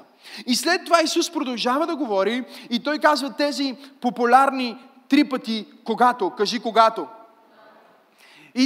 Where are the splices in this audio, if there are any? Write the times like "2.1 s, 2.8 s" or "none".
none